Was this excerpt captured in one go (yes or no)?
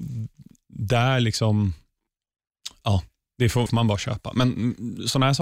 no